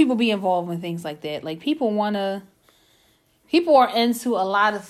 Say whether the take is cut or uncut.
uncut